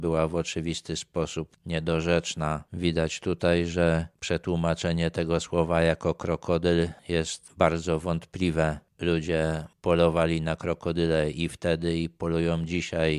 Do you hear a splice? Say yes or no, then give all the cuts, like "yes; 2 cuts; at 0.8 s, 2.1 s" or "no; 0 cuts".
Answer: no; 0 cuts